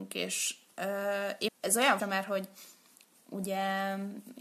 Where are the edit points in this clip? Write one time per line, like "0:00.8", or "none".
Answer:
0:01.5
0:02.0